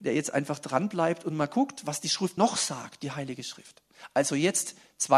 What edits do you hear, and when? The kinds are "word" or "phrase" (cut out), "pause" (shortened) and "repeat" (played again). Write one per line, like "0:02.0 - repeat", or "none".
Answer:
0:02.4 - word